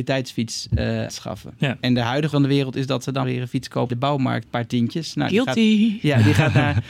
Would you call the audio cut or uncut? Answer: cut